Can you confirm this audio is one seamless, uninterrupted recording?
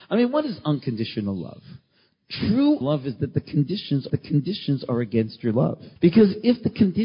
no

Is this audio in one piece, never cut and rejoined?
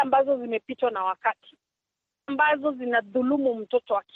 no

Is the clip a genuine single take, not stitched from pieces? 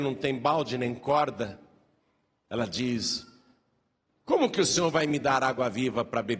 yes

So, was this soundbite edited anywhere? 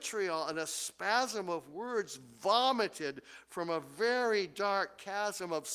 no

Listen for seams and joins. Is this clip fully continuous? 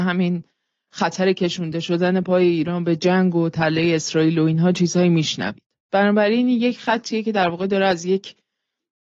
yes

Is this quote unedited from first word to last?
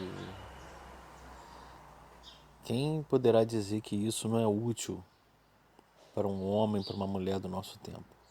yes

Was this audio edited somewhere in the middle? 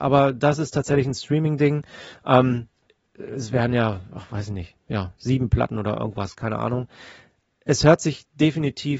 no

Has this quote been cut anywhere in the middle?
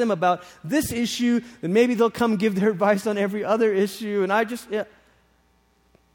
no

